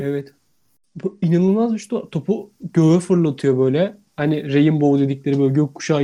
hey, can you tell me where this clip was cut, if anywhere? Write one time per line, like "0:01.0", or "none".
none